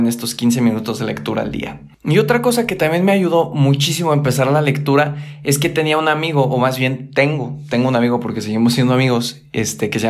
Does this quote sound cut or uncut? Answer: cut